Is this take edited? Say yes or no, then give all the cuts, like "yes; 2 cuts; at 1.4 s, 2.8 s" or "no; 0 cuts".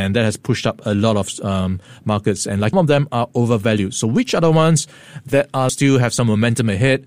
yes; 2 cuts; at 2.7 s, 5.7 s